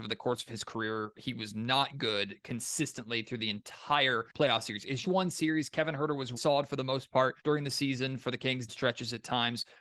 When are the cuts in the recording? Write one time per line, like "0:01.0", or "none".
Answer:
0:04.3
0:05.0
0:06.4
0:07.4
0:08.7